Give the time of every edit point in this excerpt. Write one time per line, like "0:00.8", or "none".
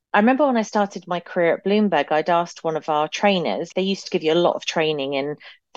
none